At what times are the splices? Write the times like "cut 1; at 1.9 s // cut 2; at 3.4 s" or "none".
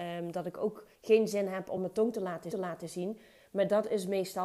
cut 1; at 1.0 s // cut 2; at 1.8 s // cut 3; at 2.5 s